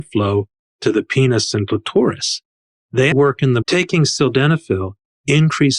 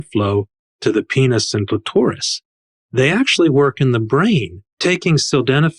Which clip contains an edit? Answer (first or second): first